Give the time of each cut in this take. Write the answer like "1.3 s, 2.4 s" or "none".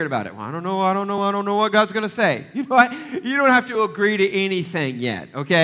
none